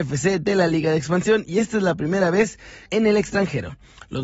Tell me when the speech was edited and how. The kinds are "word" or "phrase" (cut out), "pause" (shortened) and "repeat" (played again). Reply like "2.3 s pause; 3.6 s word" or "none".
2.9 s phrase